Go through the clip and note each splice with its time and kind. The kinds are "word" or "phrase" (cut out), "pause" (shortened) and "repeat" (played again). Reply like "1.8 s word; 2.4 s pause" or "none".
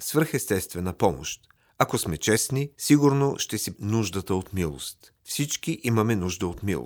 1.6 s pause; 2.7 s pause; 3.8 s word; 5.2 s pause

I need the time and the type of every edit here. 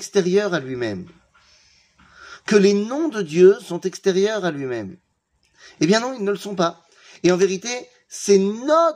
none

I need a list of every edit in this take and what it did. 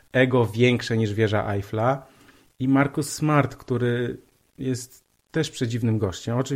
none

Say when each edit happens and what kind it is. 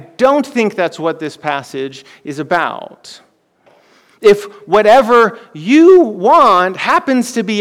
none

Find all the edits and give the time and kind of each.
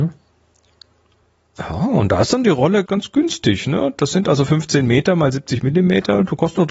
2.9 s word

